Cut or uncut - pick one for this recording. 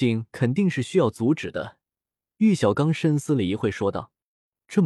uncut